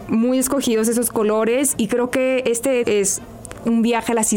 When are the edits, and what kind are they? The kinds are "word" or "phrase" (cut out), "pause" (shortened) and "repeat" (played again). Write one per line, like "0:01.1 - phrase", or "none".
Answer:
0:01.8 - word
0:02.8 - word